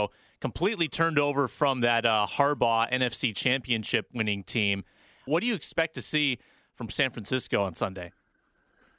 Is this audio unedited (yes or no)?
yes